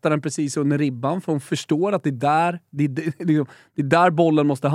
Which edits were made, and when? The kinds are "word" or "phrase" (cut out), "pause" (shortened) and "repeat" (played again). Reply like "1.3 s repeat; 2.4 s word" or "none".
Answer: none